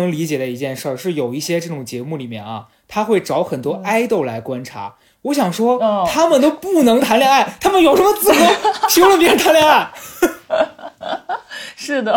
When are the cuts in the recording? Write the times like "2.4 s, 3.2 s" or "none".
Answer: none